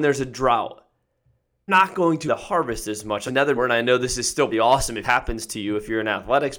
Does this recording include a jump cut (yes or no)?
yes